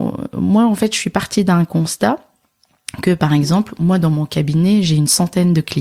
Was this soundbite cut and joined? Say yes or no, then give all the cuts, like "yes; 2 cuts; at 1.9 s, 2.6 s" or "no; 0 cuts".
no; 0 cuts